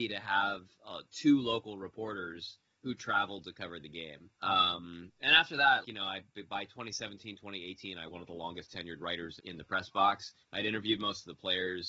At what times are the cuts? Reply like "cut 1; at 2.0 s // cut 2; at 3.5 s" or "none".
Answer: cut 1; at 4.3 s // cut 2; at 5.8 s // cut 3; at 8.1 s // cut 4; at 9.4 s // cut 5; at 10.4 s